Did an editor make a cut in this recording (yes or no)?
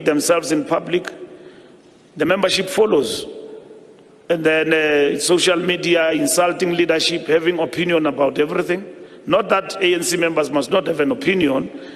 no